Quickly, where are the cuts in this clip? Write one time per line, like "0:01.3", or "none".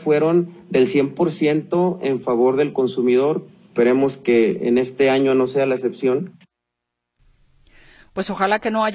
none